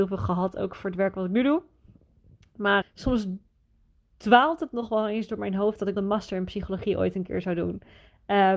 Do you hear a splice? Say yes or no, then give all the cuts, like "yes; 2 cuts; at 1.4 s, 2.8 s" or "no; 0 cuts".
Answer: yes; 2 cuts; at 2.8 s, 6.0 s